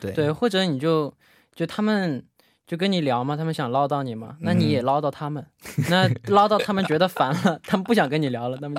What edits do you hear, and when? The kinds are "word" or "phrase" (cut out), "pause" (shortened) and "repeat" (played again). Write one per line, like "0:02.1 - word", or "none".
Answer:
none